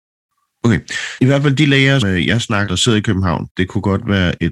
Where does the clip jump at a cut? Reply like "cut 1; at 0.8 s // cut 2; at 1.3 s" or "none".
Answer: cut 1; at 1.2 s // cut 2; at 2.0 s // cut 3; at 2.7 s // cut 4; at 3.5 s

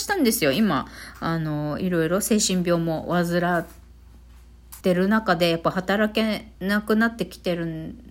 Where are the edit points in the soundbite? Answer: cut 1; at 4.8 s // cut 2; at 6.5 s

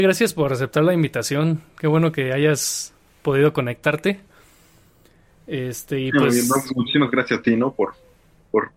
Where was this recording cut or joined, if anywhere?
none

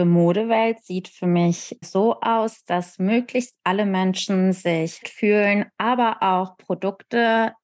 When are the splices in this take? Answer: cut 1; at 1.8 s // cut 2; at 5.0 s

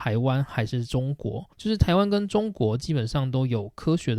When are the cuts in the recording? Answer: cut 1; at 1.5 s

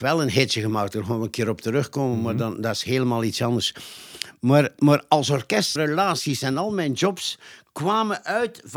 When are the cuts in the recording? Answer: cut 1; at 5.8 s

